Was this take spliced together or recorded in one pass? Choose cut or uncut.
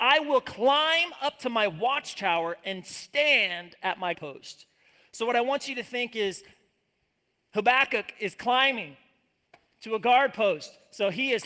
cut